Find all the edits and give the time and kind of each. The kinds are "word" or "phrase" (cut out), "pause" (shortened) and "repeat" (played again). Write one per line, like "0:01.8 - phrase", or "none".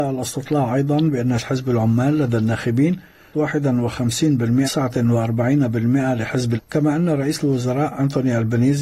0:01.4 - word
0:03.3 - word
0:04.6 - word
0:06.6 - word